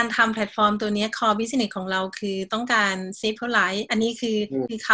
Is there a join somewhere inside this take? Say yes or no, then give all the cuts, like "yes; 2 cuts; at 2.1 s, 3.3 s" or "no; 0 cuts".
yes; 1 cut; at 3.4 s